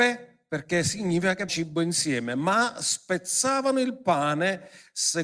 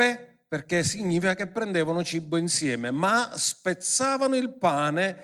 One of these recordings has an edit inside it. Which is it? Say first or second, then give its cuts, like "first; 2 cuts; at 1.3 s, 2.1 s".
first; 1 cut; at 1.5 s